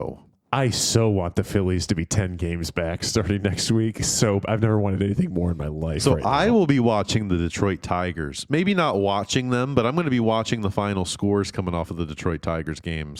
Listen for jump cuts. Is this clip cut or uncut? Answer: uncut